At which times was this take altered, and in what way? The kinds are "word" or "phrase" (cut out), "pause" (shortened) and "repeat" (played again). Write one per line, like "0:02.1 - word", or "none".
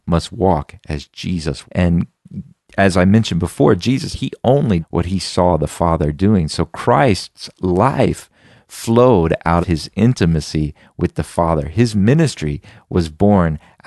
0:01.6 - word
0:04.1 - word
0:04.8 - word
0:09.6 - word